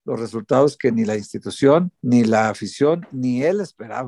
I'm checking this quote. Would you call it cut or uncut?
cut